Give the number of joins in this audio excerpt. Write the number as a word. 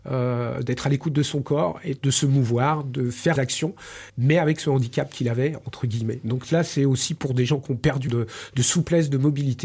four